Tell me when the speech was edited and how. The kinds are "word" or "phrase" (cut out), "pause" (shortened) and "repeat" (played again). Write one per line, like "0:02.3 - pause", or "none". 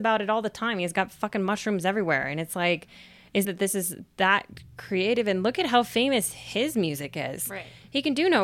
0:03.4 - phrase